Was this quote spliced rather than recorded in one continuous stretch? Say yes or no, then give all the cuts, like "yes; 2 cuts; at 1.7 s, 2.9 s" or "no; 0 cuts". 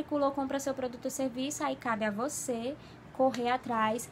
no; 0 cuts